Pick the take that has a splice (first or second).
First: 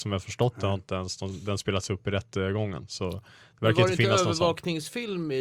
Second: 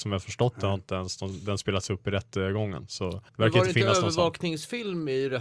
second